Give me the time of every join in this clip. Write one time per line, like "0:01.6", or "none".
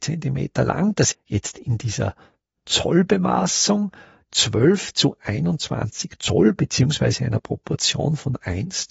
0:01.1